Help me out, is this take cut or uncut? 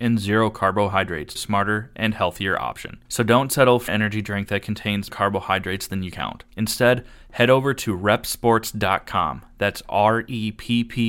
cut